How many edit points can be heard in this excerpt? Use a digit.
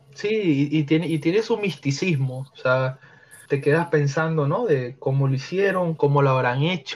1